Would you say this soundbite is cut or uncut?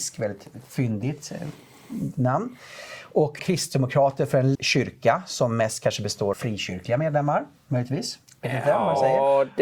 cut